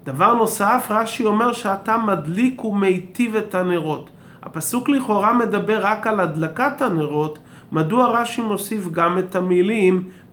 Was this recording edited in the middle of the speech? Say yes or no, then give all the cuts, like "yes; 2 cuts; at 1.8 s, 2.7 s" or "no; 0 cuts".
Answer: no; 0 cuts